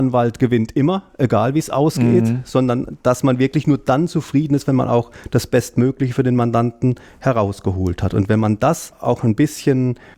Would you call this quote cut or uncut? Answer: uncut